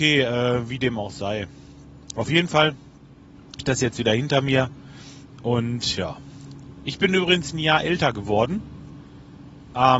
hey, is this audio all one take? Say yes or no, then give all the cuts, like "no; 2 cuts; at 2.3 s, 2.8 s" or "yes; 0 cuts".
no; 1 cut; at 3.6 s